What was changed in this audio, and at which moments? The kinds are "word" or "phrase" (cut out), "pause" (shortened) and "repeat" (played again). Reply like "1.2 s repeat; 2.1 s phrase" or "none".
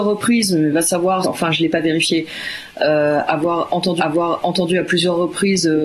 1.2 s word; 4.0 s repeat